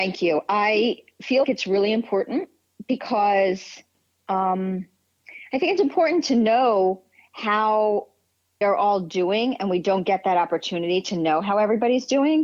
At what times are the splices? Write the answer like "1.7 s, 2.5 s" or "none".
1.4 s, 8.6 s